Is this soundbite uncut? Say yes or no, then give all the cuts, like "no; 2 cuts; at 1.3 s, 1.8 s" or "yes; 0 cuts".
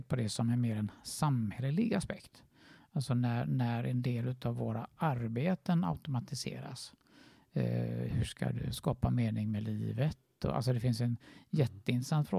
yes; 0 cuts